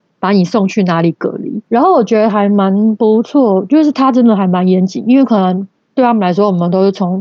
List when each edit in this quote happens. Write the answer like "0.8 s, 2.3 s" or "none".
1.7 s